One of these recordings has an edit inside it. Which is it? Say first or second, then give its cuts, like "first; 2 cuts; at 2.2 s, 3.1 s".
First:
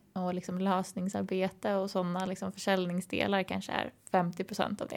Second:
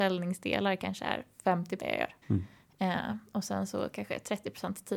second; 2 cuts; at 1.8 s, 2.2 s